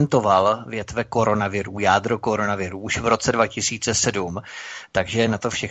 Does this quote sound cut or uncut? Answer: uncut